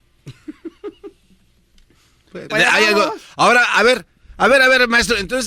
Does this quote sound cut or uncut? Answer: cut